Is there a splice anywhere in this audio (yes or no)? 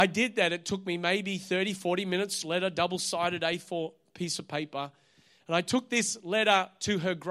yes